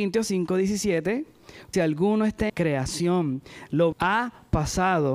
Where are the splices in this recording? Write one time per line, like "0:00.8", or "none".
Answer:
0:01.7
0:02.5
0:03.9